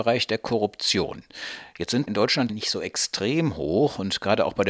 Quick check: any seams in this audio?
yes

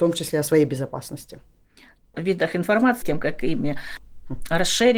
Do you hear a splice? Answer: yes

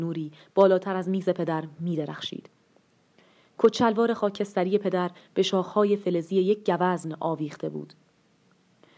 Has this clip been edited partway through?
no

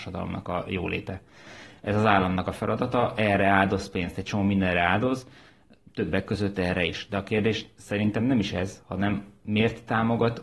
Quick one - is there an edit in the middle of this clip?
no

